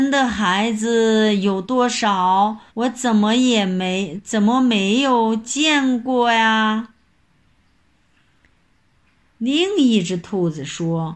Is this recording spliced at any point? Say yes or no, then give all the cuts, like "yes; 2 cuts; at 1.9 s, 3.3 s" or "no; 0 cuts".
yes; 1 cut; at 2.7 s